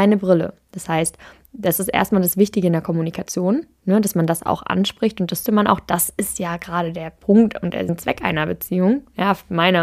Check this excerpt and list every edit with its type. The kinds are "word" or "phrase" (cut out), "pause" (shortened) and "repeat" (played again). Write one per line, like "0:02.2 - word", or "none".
0:05.5 - word
0:07.9 - word